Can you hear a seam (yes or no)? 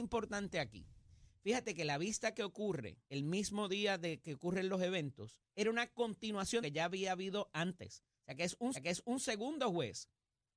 yes